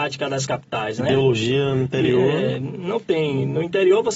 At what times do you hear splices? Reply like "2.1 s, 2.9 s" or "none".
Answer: none